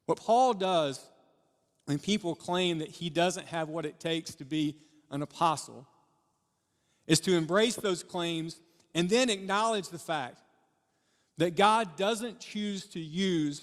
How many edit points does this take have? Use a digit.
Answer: 0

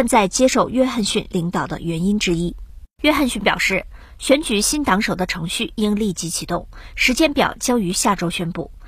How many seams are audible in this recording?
1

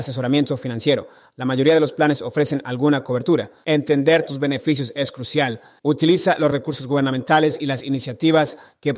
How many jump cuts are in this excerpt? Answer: 0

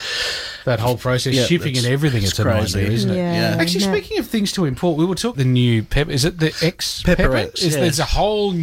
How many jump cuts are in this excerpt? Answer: 1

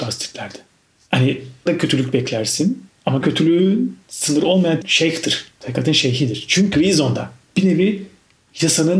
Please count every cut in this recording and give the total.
4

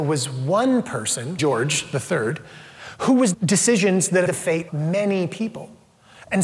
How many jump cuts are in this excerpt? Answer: 4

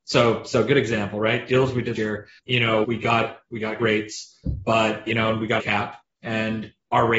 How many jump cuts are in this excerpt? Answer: 6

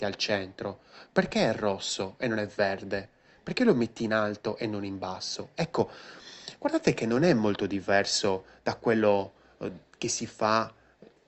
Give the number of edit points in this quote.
0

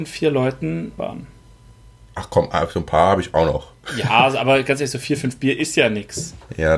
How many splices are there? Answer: 1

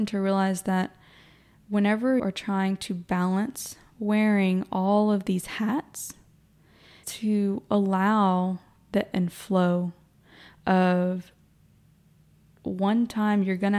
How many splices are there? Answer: 3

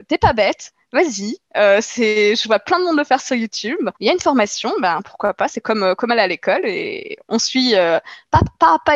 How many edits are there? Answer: 1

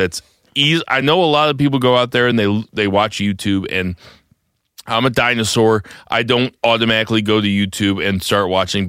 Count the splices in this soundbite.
0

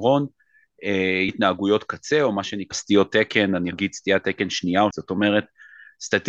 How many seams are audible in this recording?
4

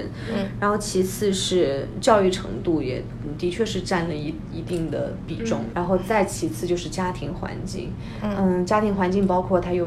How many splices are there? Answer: 1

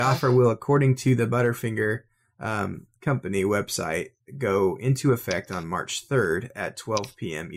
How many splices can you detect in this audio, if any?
1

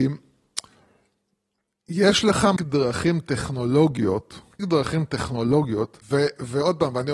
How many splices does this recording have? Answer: 3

